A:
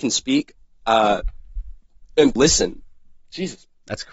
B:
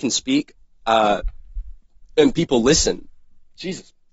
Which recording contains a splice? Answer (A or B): A